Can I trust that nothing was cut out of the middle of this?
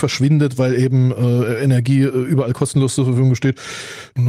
yes; 0 cuts

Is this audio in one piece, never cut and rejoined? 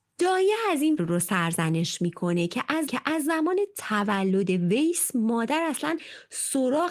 no; 2 cuts; at 1.0 s, 2.9 s

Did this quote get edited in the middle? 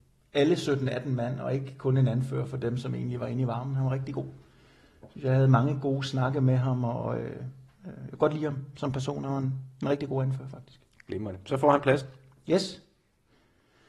no; 0 cuts

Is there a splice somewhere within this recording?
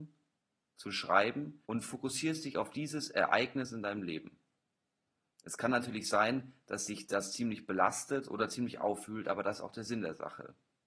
yes; 1 cut; at 1.6 s

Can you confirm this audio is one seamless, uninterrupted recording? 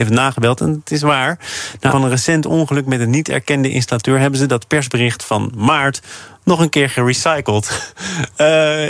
no; 1 cut; at 1.9 s

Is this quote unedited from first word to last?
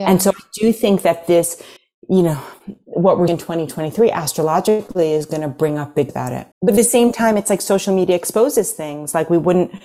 no; 4 cuts; at 1.8 s, 3.3 s, 6.1 s, 6.5 s

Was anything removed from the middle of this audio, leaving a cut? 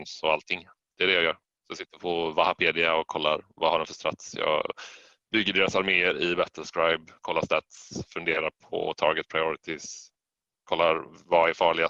no; 0 cuts

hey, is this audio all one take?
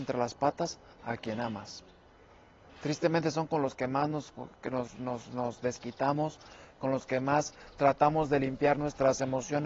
yes; 0 cuts

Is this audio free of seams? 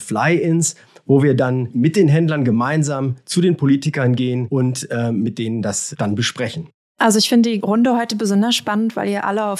no; 1 cut; at 6.8 s

